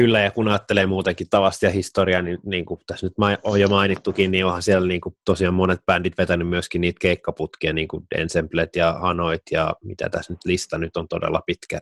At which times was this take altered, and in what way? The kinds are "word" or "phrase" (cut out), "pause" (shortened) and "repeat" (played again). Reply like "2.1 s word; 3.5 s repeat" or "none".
none